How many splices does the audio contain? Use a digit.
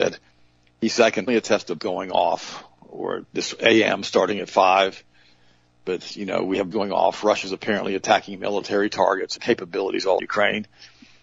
5